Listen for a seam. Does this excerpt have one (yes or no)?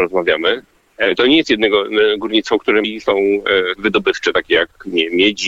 yes